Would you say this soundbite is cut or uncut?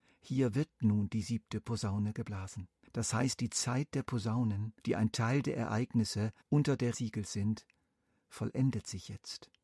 cut